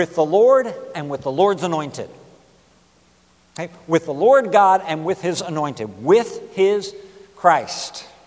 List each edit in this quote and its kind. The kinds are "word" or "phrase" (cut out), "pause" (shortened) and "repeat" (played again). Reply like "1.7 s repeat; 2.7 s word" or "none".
none